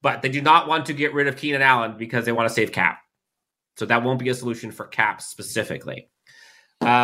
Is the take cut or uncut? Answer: uncut